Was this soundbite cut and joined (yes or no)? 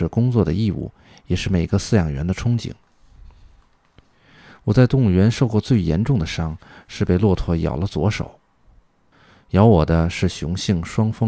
no